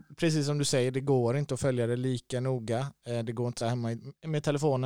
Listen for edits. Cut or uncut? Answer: cut